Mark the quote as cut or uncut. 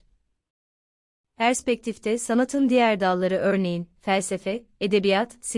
uncut